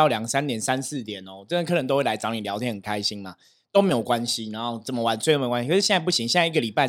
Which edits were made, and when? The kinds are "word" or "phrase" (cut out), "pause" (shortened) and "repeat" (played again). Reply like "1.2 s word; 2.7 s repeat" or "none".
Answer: none